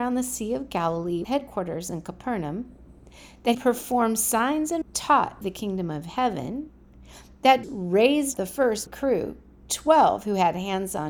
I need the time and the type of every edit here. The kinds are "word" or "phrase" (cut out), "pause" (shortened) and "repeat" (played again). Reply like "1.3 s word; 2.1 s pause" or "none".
1.2 s word; 3.5 s word; 4.8 s word; 5.4 s word; 7.6 s word; 8.3 s word; 8.9 s word